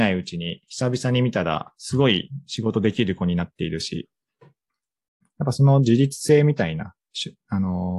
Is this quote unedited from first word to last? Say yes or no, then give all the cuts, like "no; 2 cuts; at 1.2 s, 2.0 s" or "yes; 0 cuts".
yes; 0 cuts